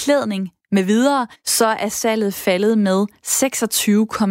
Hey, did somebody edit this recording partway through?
yes; 1 cut; at 1.3 s

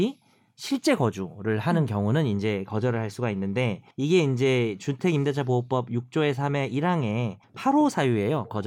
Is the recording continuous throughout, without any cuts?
no; 2 cuts; at 3.9 s, 7.4 s

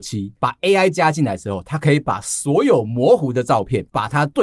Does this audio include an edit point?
no; 0 cuts

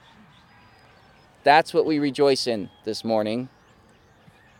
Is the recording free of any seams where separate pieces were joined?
yes; 0 cuts

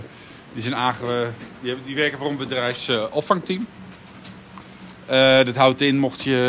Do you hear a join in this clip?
no; 0 cuts

